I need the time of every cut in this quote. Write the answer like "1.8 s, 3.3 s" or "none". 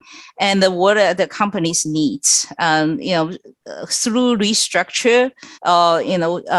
5.5 s